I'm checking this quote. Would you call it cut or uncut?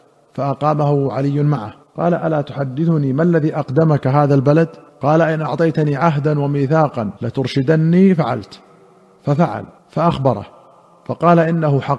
cut